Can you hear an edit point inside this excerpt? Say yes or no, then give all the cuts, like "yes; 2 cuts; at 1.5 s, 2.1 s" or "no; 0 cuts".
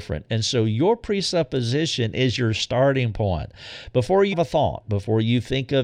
yes; 1 cut; at 4.3 s